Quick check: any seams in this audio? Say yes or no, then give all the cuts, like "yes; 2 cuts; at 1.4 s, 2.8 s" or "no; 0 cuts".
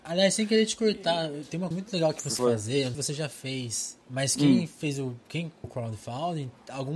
yes; 5 cuts; at 1.7 s, 2.4 s, 2.9 s, 4.0 s, 5.6 s